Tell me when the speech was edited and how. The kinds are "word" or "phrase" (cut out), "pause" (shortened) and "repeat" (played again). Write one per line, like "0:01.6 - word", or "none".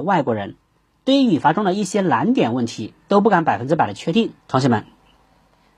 0:04.4 - pause

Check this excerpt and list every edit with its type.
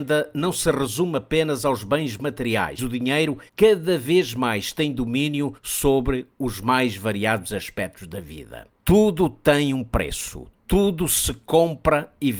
0:02.8 - word
0:03.5 - pause
0:05.6 - pause
0:08.7 - pause

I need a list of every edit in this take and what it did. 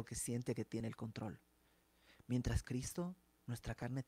0:02.6 - phrase

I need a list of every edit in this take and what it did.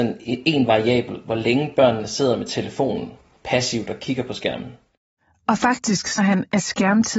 0:06.2 - word

